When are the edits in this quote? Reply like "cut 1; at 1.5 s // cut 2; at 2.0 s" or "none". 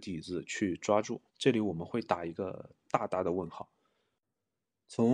cut 1; at 1.3 s